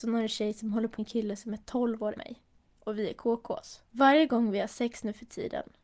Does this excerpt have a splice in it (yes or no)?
yes